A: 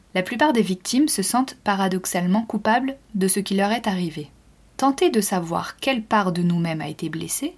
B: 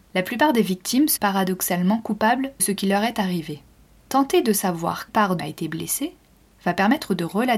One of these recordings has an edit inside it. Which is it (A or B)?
B